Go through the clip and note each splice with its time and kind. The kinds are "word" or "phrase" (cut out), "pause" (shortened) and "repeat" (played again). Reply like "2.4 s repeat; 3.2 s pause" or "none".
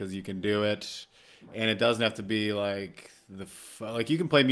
none